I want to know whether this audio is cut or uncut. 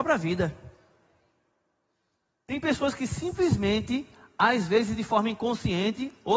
uncut